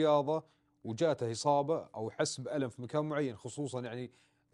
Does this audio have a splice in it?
no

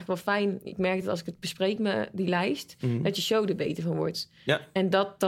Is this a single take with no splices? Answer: yes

